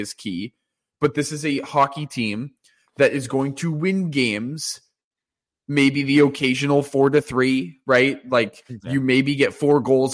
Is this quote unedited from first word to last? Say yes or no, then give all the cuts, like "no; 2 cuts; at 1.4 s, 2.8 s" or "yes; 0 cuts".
yes; 0 cuts